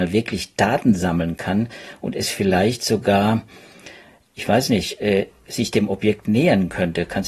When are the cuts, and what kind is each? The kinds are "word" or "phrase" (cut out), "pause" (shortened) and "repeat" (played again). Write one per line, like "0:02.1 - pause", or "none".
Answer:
none